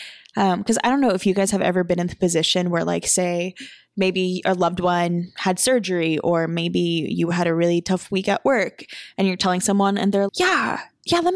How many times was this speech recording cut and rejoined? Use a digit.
1